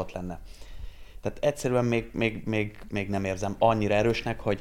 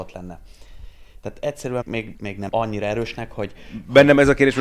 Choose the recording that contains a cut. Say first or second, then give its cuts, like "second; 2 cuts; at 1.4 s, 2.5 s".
second; 3 cuts; at 1.8 s, 2.1 s, 2.5 s